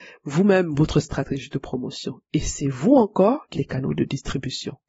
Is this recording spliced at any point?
yes; 1 cut; at 3.5 s

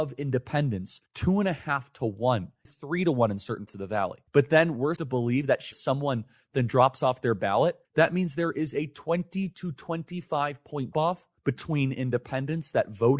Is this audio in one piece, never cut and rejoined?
no; 9 cuts; at 1.1 s, 2.7 s, 3.7 s, 4.3 s, 5.0 s, 5.7 s, 7.8 s, 10.9 s, 11.4 s

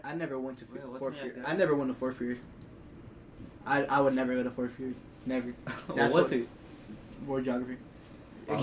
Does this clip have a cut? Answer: no; 0 cuts

